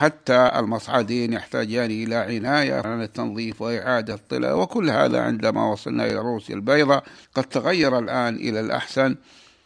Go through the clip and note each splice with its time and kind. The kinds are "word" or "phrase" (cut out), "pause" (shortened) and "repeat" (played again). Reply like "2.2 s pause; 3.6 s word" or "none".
2.8 s word; 7.2 s pause